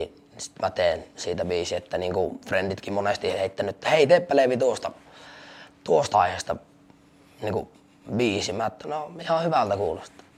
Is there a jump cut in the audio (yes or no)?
yes